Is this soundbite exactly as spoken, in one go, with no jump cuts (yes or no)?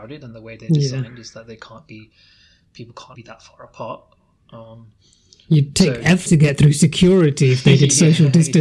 no